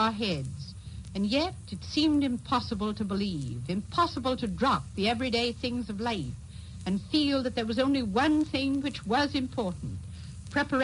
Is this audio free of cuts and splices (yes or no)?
yes